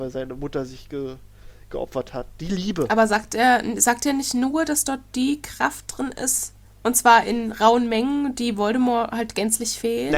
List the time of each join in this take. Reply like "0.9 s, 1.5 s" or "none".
6.7 s